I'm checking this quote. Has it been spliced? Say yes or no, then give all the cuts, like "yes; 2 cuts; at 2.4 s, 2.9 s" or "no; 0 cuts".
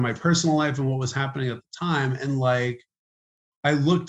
no; 0 cuts